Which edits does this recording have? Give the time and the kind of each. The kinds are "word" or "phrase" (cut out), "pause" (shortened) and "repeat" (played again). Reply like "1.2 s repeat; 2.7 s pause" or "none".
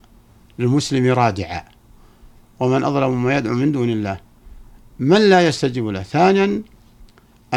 none